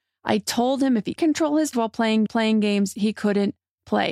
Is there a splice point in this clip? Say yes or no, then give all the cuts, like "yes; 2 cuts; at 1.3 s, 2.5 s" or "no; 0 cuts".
yes; 3 cuts; at 1.2 s, 1.7 s, 2.3 s